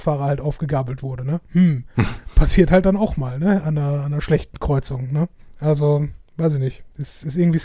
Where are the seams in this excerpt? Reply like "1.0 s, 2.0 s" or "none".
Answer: 1.5 s, 5.4 s